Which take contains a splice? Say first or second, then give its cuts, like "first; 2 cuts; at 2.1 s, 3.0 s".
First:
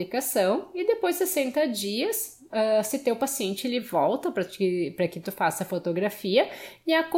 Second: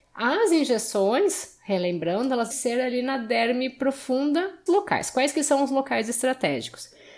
second; 2 cuts; at 2.5 s, 4.7 s